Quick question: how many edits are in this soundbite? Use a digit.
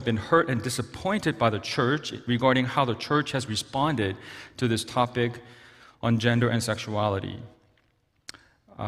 0